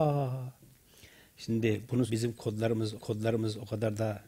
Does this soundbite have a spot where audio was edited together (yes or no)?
yes